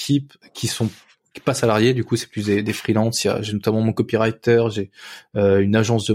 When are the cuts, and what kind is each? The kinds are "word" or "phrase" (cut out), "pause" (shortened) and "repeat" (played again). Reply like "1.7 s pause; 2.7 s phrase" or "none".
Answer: none